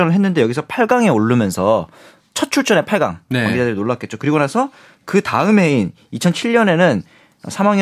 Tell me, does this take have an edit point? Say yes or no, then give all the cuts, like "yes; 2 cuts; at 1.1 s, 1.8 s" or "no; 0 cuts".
no; 0 cuts